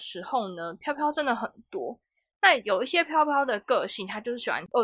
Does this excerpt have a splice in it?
no; 0 cuts

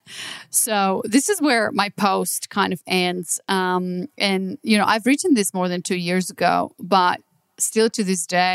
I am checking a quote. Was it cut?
no; 0 cuts

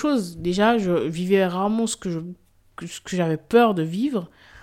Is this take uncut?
yes; 0 cuts

